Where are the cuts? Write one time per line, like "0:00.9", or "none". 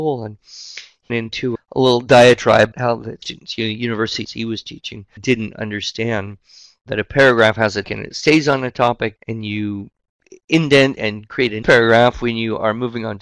0:01.1
0:01.5
0:02.7
0:03.2
0:04.2
0:05.2
0:07.8
0:09.2
0:11.6